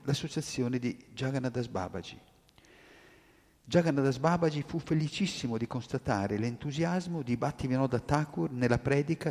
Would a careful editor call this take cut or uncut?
uncut